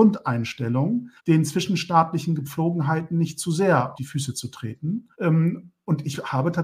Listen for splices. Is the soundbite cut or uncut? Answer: cut